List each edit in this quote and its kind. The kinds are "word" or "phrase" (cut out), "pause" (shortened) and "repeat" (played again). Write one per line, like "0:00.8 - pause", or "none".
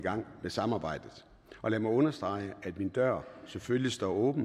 none